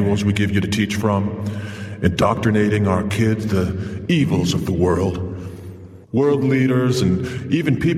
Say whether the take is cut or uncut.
cut